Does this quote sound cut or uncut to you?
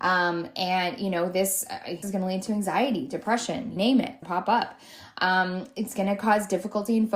cut